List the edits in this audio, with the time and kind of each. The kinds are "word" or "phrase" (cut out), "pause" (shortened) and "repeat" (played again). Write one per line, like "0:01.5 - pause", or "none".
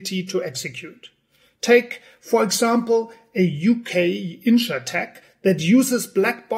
none